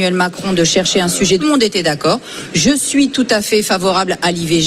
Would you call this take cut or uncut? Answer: cut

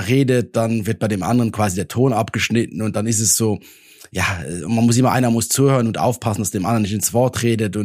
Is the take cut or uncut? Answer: uncut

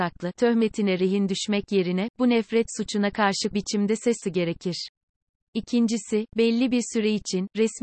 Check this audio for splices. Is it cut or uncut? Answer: cut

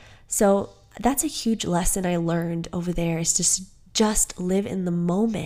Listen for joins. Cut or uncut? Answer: uncut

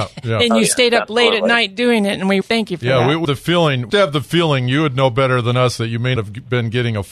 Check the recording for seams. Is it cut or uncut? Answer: cut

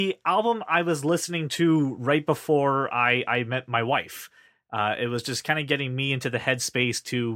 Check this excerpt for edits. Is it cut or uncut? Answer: uncut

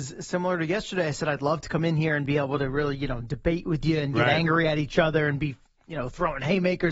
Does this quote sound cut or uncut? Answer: uncut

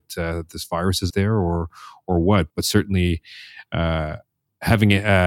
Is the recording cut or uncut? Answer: cut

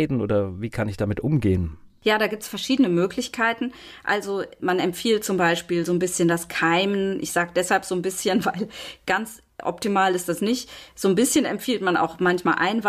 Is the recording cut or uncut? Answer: uncut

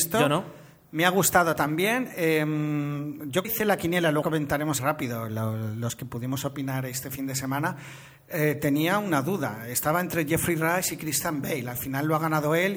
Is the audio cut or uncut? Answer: cut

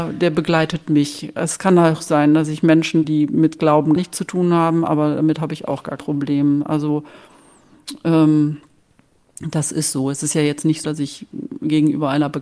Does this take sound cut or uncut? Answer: cut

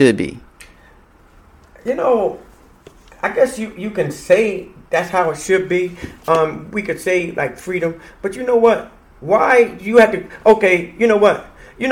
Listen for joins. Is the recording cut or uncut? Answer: uncut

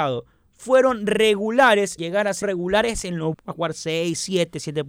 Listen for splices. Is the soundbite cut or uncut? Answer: cut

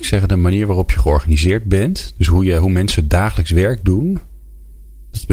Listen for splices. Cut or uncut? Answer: uncut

